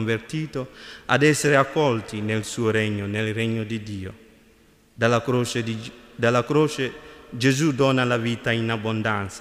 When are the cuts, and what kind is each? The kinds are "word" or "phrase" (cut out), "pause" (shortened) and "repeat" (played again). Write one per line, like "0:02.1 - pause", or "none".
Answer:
none